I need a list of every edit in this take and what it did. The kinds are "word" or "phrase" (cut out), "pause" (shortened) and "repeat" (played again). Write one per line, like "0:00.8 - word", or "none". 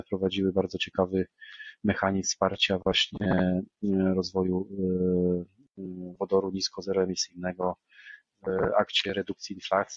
none

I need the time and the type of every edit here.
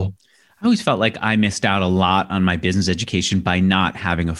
none

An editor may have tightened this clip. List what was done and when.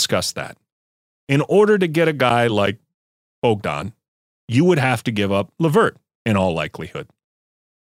none

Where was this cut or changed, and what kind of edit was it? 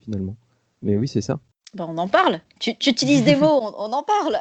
none

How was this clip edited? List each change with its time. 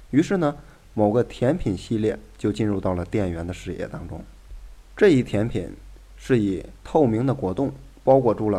0:04.9 - pause

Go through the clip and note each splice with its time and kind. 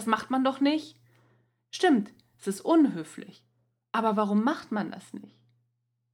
none

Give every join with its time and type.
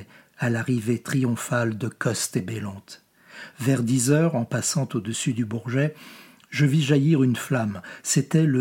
none

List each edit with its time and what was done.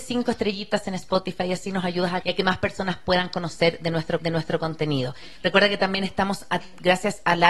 0:02.2 - word
0:04.2 - repeat

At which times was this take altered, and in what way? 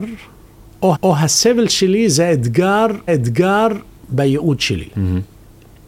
0:00.9 - repeat
0:03.1 - repeat

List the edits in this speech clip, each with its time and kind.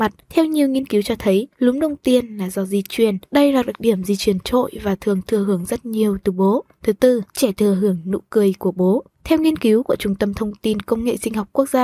0:01.5 - pause
0:07.3 - pause

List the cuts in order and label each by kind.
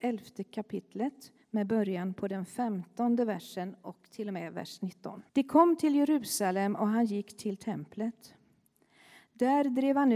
0:01.4 - pause
0:05.3 - pause

